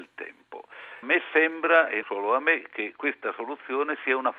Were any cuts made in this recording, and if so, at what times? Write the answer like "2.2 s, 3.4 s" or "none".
1.0 s, 2.0 s